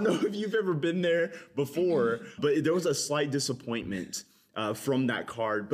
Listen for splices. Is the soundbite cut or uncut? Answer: cut